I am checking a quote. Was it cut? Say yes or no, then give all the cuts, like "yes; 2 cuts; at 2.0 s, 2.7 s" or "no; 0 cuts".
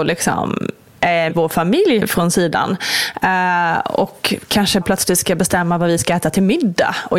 yes; 3 cuts; at 1.3 s, 2.0 s, 4.8 s